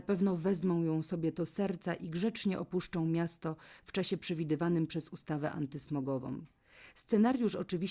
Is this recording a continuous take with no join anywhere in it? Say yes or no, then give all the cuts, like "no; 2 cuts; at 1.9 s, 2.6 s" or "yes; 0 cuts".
yes; 0 cuts